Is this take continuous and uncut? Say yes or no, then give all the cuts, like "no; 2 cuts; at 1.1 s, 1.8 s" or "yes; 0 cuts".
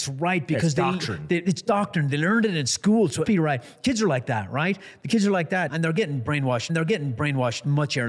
no; 3 cuts; at 3.2 s, 5.7 s, 6.7 s